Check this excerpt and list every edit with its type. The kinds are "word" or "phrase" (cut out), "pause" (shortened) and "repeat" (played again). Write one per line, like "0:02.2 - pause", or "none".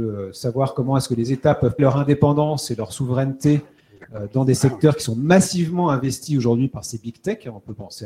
0:01.8 - word

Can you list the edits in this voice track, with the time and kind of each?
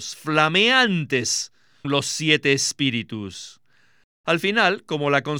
0:01.8 - word

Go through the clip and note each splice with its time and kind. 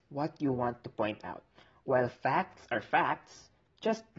none

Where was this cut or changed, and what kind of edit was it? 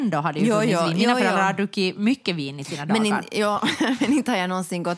none

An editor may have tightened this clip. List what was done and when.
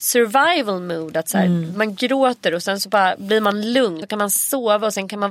0:04.0 - word

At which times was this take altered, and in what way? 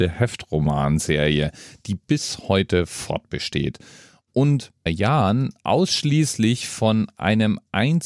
0:04.9 - phrase

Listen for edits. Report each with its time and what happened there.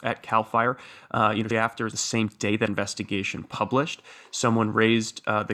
0:01.5 - word
0:01.9 - word
0:02.7 - word

